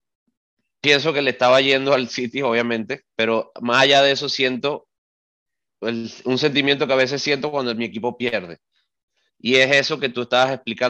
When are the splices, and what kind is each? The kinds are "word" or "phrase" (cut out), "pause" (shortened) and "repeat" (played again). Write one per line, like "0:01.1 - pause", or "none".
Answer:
none